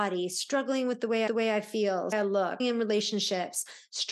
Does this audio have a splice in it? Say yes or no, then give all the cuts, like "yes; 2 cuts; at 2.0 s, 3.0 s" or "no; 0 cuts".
yes; 3 cuts; at 1.3 s, 2.1 s, 2.6 s